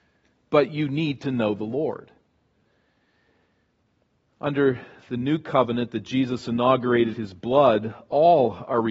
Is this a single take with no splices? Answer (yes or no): no